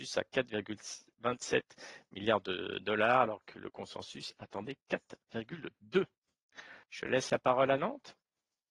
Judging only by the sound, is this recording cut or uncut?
cut